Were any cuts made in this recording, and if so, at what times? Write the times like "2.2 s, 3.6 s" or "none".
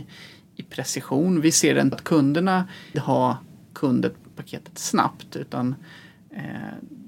1.9 s, 2.9 s, 4.3 s